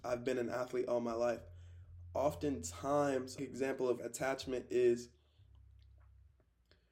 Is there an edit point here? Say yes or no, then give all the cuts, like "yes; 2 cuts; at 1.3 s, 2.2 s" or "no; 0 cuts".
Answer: yes; 2 cuts; at 3.4 s, 4.0 s